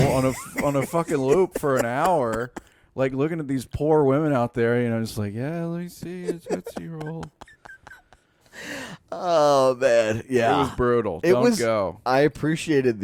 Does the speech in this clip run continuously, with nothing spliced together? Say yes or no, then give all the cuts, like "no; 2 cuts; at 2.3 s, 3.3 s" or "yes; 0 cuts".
yes; 0 cuts